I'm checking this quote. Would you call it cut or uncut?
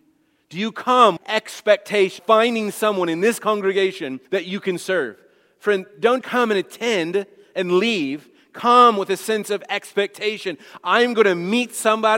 cut